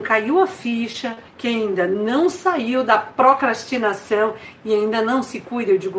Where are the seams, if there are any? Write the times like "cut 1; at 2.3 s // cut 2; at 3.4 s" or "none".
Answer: cut 1; at 1.3 s